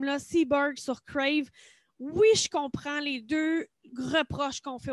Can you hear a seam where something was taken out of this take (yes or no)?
no